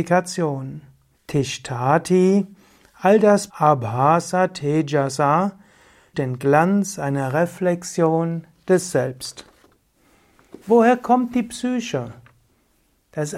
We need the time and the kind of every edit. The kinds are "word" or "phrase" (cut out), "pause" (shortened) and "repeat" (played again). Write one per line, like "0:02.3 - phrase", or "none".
0:01.1 - pause
0:03.5 - phrase
0:06.1 - word
0:10.6 - pause